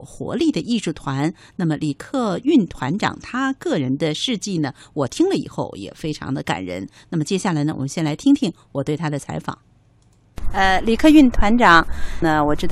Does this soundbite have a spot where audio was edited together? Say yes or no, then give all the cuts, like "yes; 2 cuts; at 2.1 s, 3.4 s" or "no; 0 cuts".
no; 0 cuts